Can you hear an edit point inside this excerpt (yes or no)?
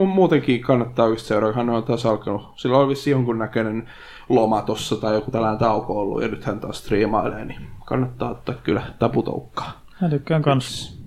no